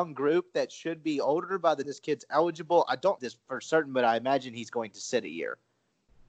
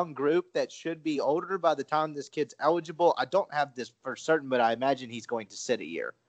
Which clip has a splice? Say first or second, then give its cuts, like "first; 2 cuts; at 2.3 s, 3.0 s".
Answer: first; 2 cuts; at 1.8 s, 3.2 s